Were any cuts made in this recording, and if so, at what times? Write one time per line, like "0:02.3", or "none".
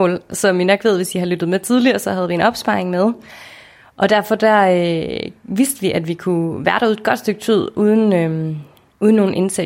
none